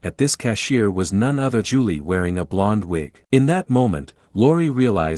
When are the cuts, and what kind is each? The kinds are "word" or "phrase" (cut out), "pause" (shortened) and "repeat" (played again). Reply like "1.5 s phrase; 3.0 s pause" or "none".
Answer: 1.6 s word; 3.2 s pause